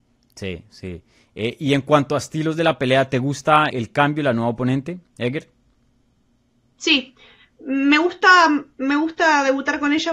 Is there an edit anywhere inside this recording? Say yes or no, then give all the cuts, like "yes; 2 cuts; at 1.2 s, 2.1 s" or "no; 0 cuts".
yes; 2 cuts; at 3.7 s, 5.1 s